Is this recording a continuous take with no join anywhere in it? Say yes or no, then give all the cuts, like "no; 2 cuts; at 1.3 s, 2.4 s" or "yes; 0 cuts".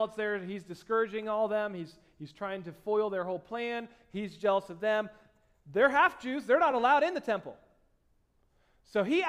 yes; 0 cuts